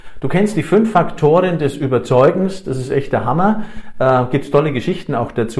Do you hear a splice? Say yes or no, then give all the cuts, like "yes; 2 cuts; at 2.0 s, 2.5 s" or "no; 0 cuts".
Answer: no; 0 cuts